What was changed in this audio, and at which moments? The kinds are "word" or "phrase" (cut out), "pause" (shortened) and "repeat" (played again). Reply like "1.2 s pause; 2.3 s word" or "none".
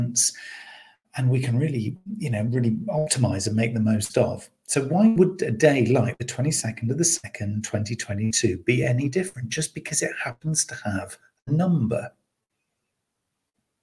none